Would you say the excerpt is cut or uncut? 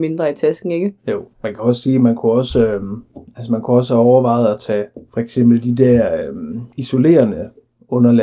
cut